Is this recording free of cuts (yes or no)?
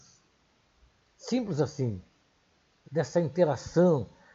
no